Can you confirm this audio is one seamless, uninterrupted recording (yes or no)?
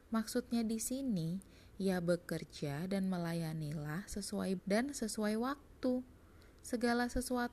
no